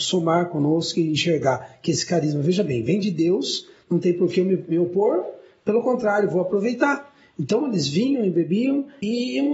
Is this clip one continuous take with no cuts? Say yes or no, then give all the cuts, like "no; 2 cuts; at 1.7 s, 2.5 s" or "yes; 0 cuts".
yes; 0 cuts